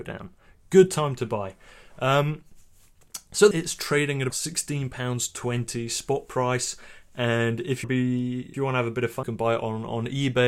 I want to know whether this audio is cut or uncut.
cut